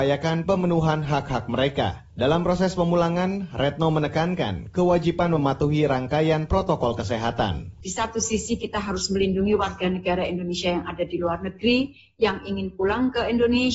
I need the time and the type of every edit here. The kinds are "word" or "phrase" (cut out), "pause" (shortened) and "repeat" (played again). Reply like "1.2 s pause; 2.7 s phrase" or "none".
none

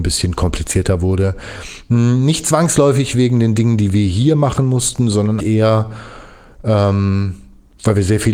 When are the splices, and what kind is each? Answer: 5.4 s word

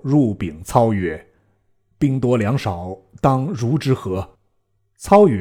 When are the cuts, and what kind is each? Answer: 1.4 s pause; 4.3 s pause

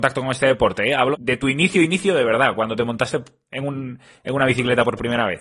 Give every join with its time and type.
1.1 s word

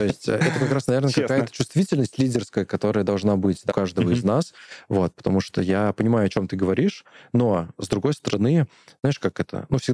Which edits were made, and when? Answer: 3.7 s word

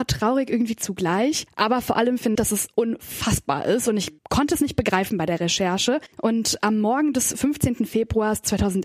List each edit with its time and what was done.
1.5 s pause; 2.4 s word; 4.2 s pause; 6.1 s pause

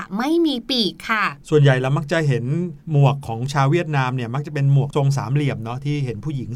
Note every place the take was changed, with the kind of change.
2.8 s pause

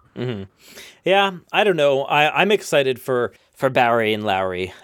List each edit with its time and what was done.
3.4 s pause

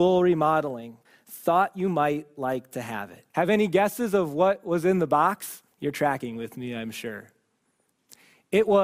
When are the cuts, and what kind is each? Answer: 1.0 s pause; 3.3 s pause; 5.7 s pause

